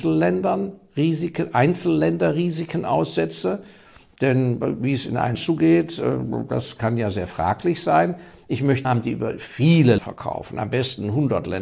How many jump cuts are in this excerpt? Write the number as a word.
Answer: three